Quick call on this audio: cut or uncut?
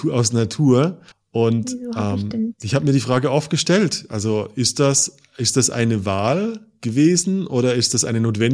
cut